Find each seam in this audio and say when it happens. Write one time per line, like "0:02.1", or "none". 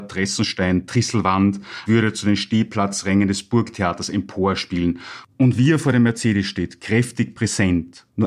0:01.9